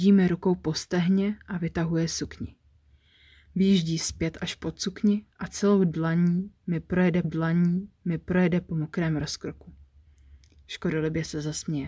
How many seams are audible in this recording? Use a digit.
1